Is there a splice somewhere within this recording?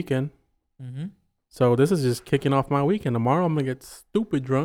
no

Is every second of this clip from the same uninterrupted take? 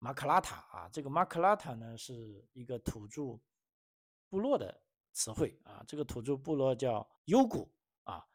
no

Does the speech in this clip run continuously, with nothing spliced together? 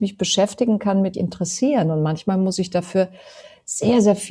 no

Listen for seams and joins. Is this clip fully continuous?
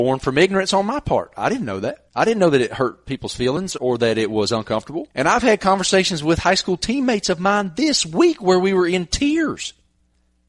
no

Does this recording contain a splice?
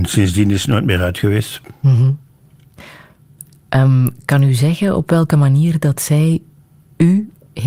no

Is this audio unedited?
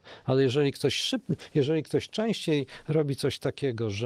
yes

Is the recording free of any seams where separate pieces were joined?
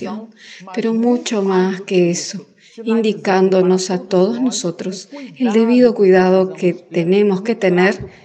yes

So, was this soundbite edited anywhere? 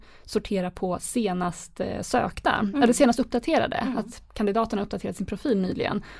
no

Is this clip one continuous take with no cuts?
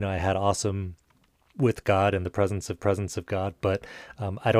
no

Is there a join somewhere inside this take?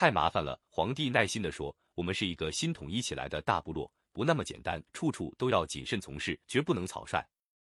yes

